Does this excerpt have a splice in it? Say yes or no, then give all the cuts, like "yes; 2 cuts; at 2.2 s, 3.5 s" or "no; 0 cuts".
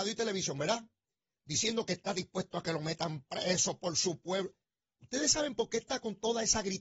no; 0 cuts